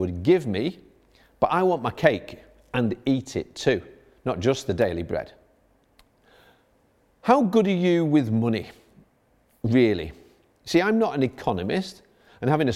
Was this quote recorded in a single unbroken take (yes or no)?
yes